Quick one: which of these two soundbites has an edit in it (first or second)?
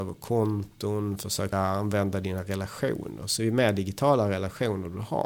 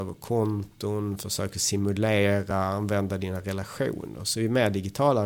first